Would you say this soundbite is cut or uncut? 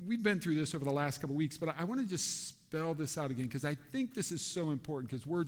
uncut